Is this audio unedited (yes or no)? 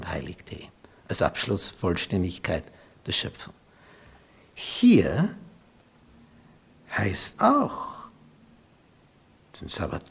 no